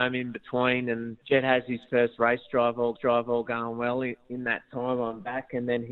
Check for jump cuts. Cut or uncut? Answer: cut